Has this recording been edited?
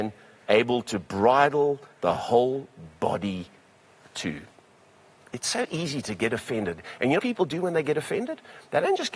yes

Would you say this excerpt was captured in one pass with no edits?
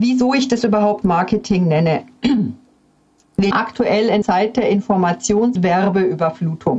no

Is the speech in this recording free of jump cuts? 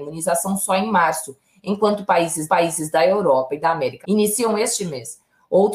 no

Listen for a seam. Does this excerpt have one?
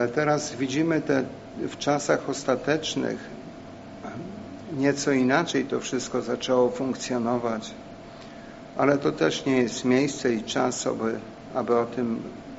no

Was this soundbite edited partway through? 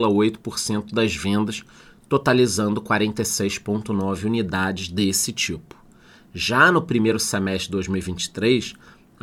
no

